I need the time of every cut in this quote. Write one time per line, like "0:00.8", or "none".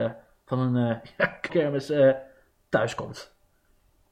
0:01.5